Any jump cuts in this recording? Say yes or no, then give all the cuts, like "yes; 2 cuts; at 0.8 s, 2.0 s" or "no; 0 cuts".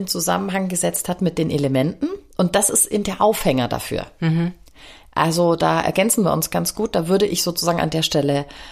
yes; 1 cut; at 3.0 s